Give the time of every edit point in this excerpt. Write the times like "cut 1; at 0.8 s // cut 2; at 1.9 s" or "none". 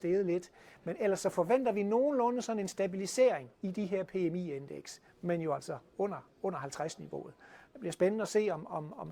cut 1; at 3.5 s